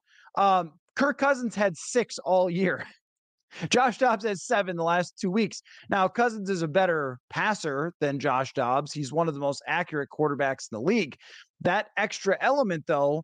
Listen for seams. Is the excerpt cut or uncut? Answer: uncut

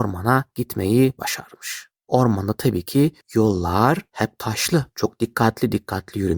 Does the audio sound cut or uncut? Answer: uncut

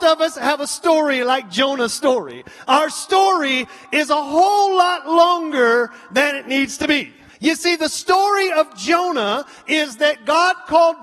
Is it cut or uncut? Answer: cut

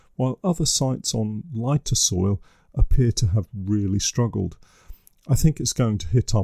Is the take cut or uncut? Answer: uncut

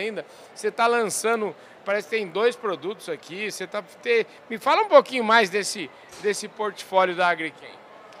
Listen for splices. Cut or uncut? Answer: uncut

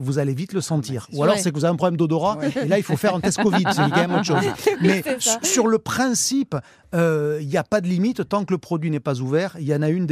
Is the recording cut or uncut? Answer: uncut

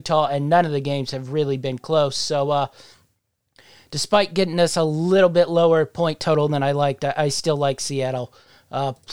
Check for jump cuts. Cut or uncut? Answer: uncut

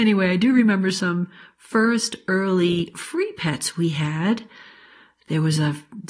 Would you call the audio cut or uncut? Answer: uncut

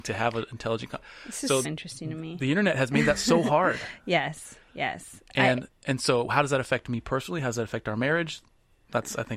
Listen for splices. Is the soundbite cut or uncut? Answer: cut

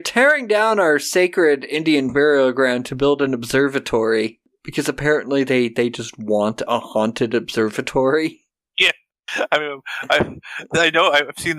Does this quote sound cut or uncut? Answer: uncut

